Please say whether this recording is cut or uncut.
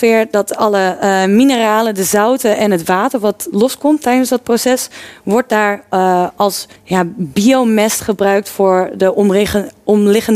cut